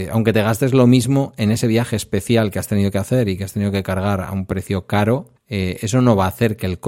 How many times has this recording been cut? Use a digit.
1